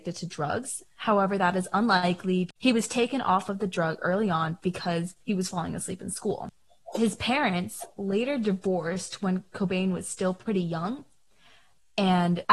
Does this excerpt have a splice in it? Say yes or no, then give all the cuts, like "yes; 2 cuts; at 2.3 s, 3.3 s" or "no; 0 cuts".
yes; 2 cuts; at 2.6 s, 5.2 s